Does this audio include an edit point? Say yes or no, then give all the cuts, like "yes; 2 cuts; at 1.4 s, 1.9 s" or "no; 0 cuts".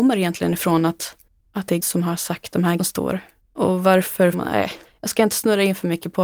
yes; 6 cuts; at 1.3 s, 1.8 s, 2.8 s, 3.4 s, 4.3 s, 4.8 s